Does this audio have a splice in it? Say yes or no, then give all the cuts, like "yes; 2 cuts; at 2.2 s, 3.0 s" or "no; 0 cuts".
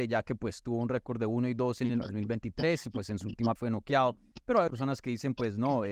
yes; 2 cuts; at 3.6 s, 4.7 s